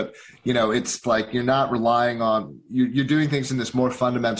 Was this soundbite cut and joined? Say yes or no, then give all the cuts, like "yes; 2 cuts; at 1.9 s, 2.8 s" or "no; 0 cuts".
yes; 1 cut; at 1.0 s